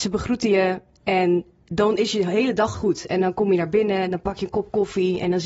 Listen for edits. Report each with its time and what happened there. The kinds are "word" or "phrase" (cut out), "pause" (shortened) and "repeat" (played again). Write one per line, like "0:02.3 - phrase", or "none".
0:02.7 - word